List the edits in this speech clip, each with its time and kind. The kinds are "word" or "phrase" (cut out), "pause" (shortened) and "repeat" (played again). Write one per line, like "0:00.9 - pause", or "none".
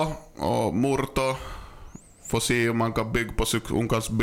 none